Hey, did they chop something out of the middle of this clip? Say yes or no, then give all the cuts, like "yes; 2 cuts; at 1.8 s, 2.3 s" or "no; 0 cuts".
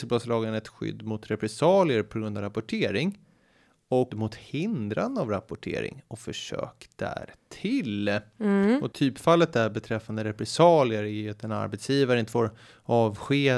yes; 1 cut; at 4.1 s